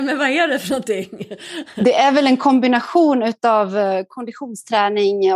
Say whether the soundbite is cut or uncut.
uncut